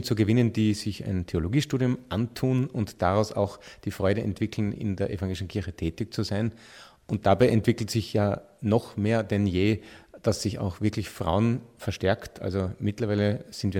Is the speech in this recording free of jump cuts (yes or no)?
yes